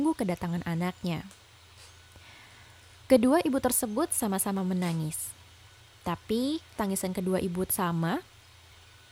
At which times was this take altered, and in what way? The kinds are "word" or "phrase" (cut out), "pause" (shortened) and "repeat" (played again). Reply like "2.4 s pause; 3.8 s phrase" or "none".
6.8 s word; 7.7 s word